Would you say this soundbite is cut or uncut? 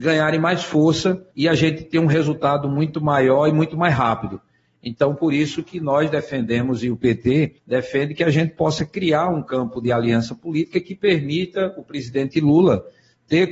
cut